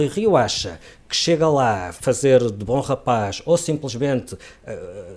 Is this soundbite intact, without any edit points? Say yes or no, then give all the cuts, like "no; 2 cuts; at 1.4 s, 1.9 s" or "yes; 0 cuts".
yes; 0 cuts